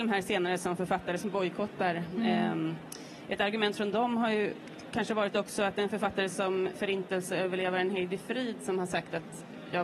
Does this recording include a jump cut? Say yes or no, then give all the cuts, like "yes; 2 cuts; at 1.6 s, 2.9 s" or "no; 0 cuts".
no; 0 cuts